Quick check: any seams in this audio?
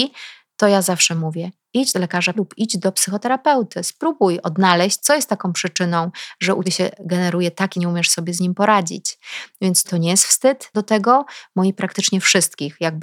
yes; 7 cuts; at 1.9 s, 2.3 s, 6.6 s, 7.7 s, 9.8 s, 10.7 s, 11.7 s

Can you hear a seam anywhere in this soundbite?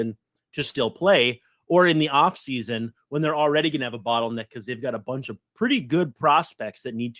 no; 0 cuts

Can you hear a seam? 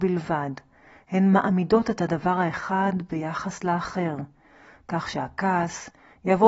no; 0 cuts

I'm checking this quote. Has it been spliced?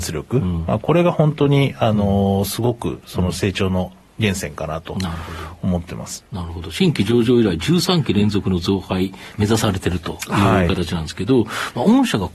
no; 0 cuts

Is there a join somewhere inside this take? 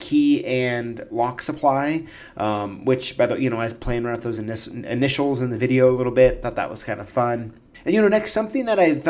no; 0 cuts

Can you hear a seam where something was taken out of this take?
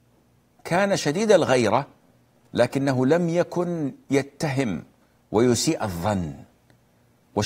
no; 0 cuts

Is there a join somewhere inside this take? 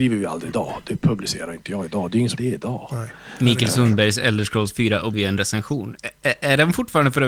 yes; 2 cuts; at 2.4 s, 5.1 s

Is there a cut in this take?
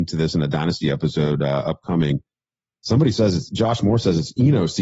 no; 0 cuts

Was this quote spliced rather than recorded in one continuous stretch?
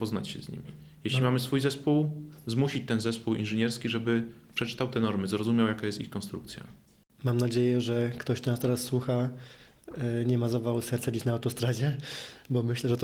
no; 0 cuts

